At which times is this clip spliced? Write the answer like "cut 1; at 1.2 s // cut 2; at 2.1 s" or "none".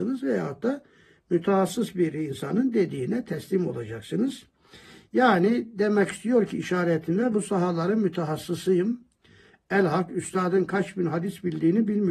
cut 1; at 7.3 s